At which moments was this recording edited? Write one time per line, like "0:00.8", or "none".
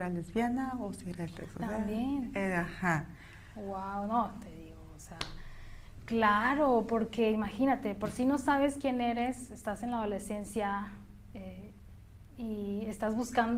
none